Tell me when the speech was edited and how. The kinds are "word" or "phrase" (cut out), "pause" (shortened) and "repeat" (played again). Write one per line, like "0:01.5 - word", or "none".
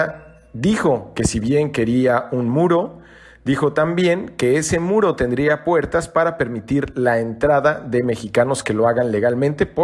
none